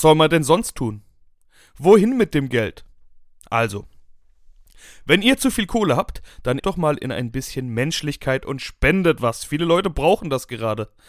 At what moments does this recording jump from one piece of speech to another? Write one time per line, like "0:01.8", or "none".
0:06.6